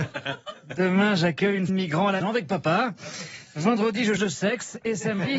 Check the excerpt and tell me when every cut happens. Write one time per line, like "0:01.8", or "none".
0:01.7
0:02.2
0:04.2